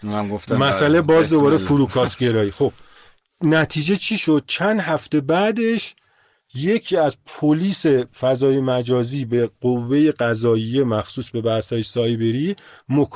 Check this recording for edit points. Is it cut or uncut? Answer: uncut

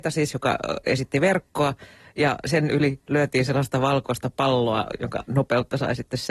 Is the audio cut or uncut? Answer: uncut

